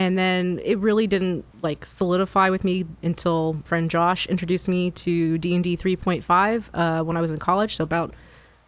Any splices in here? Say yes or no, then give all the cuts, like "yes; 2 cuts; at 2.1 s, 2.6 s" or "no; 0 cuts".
yes; 2 cuts; at 1.5 s, 3.7 s